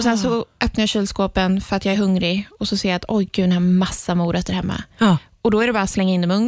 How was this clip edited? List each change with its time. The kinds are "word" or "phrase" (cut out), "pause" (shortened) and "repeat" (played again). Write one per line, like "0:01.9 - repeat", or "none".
none